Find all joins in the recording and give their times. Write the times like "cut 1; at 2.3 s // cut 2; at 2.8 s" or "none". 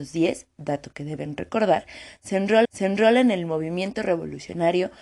cut 1; at 2.6 s